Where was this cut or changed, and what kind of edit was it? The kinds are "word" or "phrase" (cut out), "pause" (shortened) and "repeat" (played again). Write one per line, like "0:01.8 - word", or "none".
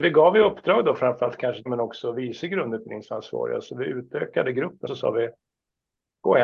0:01.7 - word
0:04.9 - word

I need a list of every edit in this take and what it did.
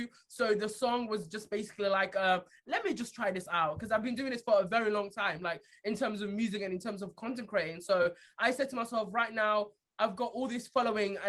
none

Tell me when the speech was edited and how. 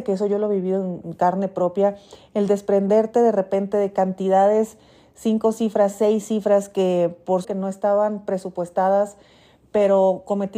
0:07.4 - word

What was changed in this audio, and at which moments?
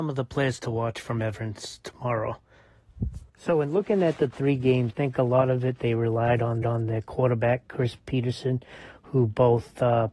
0:03.3 - pause
0:04.9 - word
0:06.6 - repeat

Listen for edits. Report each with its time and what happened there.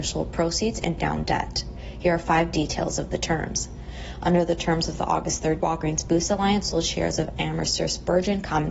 0:01.0 - word
0:05.6 - word

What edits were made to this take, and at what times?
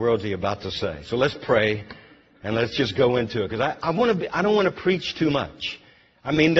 none

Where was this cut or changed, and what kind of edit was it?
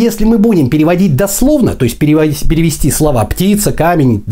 none

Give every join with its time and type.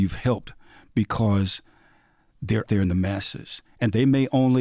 0:02.7 - word

